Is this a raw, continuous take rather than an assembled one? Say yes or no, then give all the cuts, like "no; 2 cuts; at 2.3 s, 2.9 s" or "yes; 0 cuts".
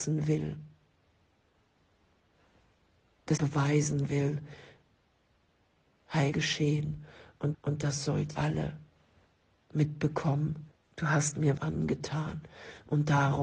no; 6 cuts; at 3.4 s, 6.3 s, 7.5 s, 8.3 s, 10.7 s, 11.6 s